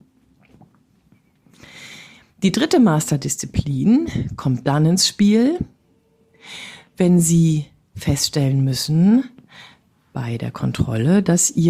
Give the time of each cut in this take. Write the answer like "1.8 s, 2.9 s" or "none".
none

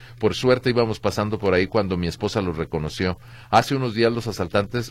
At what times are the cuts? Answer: none

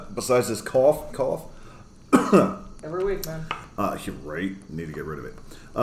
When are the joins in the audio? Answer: 1.1 s

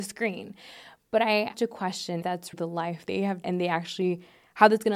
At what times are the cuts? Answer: 1.5 s, 2.2 s, 2.5 s, 3.1 s, 3.4 s

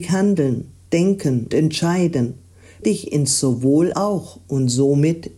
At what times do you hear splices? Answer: 1.5 s, 2.8 s, 3.9 s

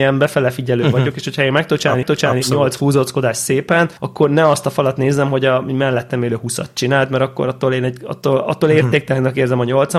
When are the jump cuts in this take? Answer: 2.0 s, 4.0 s

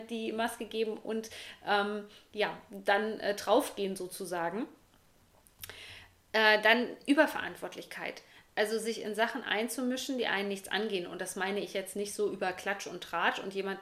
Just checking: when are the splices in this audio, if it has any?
none

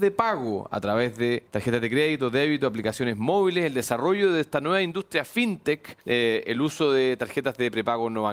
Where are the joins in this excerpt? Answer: 1.5 s, 6.0 s

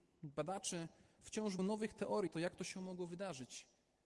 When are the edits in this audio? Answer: 1.6 s, 2.3 s

